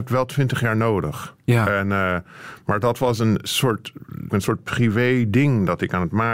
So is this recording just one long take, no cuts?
no; 1 cut; at 4.3 s

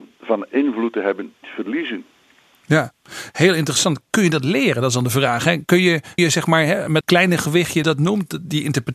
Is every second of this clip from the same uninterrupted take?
no; 4 cuts; at 1.4 s, 6.2 s, 7.0 s, 7.8 s

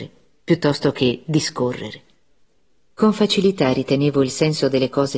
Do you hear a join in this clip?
no; 0 cuts

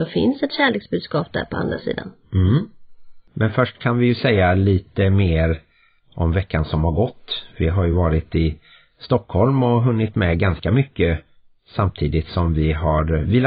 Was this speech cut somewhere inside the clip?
no; 0 cuts

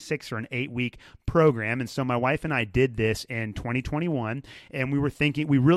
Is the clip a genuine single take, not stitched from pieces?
yes; 0 cuts

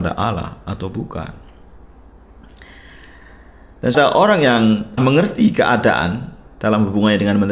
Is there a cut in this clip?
yes; 2 cuts; at 3.9 s, 5.0 s

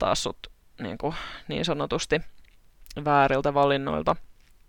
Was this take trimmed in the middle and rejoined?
no; 0 cuts

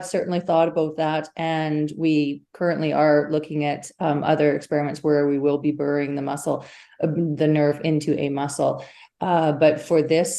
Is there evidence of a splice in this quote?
no; 0 cuts

